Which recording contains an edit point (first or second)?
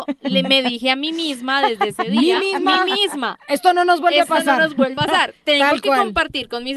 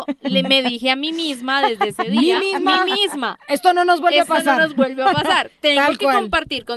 first